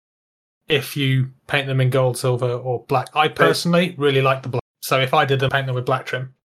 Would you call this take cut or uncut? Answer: cut